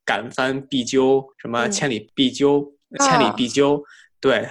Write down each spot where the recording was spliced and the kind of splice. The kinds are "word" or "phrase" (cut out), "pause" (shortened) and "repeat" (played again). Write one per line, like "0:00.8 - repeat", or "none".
0:01.3 - pause
0:03.0 - phrase